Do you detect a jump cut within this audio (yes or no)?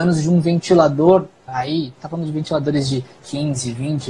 yes